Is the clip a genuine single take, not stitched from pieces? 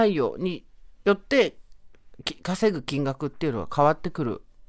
yes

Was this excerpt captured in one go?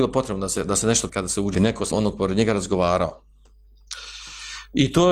no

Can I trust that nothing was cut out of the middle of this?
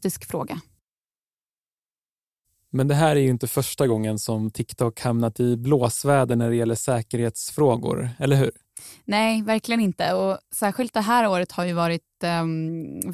yes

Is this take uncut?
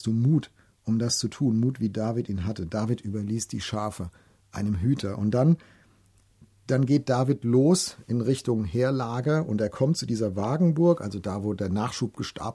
yes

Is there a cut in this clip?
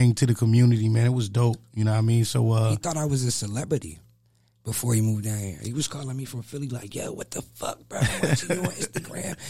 no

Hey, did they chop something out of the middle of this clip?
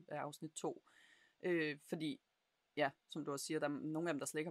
no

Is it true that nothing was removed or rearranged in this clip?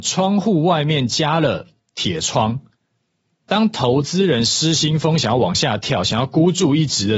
yes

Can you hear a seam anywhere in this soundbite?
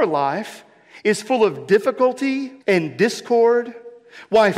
yes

